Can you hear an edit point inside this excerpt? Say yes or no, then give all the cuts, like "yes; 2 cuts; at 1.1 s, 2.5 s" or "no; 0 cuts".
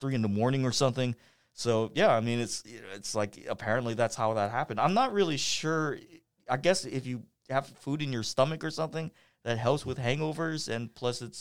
no; 0 cuts